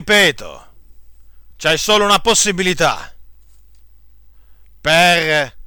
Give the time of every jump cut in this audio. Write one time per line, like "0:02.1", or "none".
0:01.5